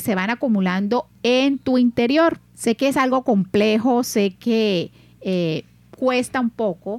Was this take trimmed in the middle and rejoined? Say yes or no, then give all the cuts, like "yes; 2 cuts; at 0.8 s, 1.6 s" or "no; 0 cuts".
yes; 1 cut; at 2.5 s